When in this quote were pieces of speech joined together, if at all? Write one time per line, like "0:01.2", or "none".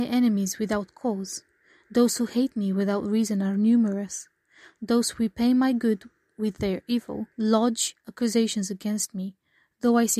0:07.3